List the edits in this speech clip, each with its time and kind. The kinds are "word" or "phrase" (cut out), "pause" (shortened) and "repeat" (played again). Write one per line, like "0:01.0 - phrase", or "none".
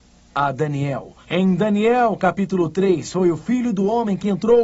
0:01.2 - pause